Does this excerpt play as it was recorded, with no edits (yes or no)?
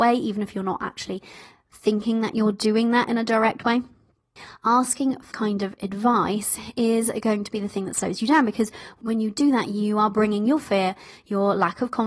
no